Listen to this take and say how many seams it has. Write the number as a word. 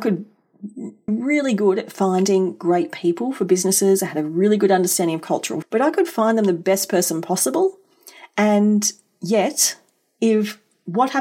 two